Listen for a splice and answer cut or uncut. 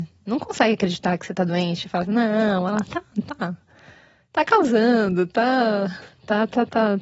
uncut